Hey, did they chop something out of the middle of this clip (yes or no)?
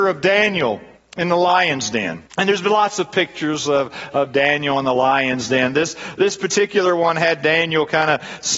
yes